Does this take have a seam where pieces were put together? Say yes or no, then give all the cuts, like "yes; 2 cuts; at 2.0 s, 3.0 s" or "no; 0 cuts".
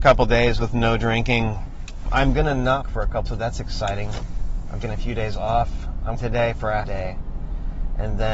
yes; 6 cuts; at 2.1 s, 2.8 s, 3.3 s, 4.8 s, 6.1 s, 6.8 s